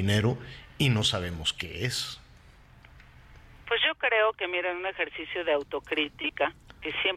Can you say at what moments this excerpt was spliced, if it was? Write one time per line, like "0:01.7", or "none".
none

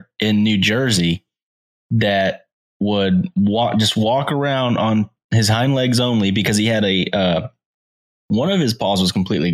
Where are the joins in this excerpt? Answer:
none

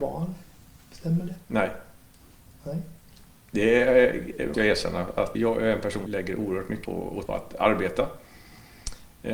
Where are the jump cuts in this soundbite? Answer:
0:04.5
0:05.3
0:06.1
0:06.8
0:07.3

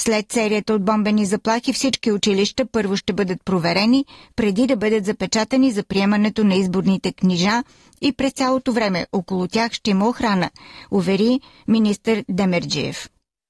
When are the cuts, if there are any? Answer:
none

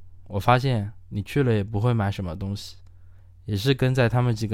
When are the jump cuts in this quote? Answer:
0:03.2

